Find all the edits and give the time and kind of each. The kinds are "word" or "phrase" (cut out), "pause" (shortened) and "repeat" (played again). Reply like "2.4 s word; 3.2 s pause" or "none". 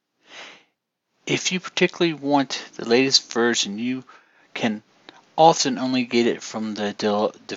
none

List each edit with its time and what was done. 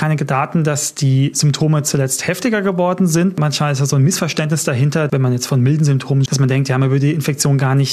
5.1 s word; 6.3 s word

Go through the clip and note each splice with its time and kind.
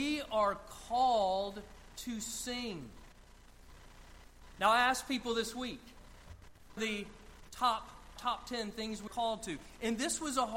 6.8 s phrase; 8.2 s word; 9.1 s word

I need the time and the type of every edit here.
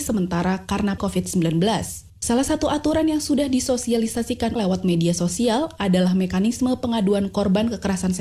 1.0 s word; 2.1 s pause; 4.6 s word

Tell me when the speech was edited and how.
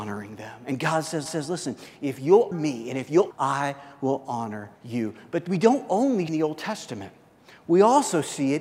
1.3 s repeat; 2.5 s word; 3.3 s phrase; 4.8 s pause; 6.3 s phrase

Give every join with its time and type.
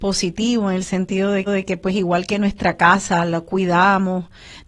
1.5 s repeat

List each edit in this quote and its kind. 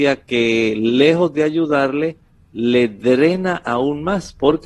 none

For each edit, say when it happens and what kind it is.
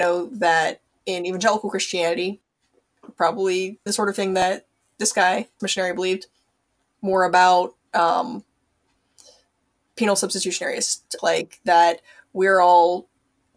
1.0 s word; 3.9 s word; 5.6 s word; 6.9 s word; 11.2 s word

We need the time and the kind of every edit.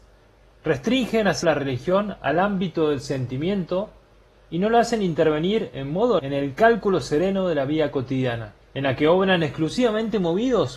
1.4 s word; 6.2 s word; 8.6 s pause

